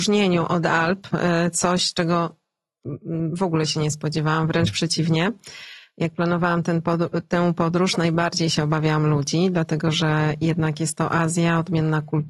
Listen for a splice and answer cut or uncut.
uncut